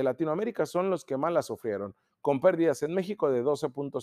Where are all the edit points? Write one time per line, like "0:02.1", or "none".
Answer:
none